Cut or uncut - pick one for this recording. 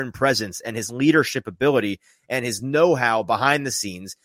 uncut